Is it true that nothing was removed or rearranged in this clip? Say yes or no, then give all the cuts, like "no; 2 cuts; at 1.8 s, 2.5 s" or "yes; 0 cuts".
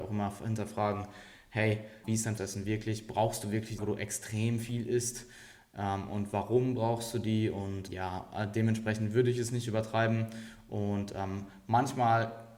no; 4 cuts; at 2.0 s, 2.4 s, 3.8 s, 7.9 s